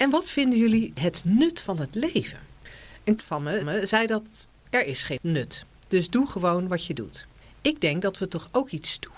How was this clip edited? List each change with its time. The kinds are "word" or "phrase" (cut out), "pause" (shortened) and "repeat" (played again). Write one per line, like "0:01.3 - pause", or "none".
0:03.2 - word
0:03.6 - repeat
0:04.6 - phrase
0:07.4 - pause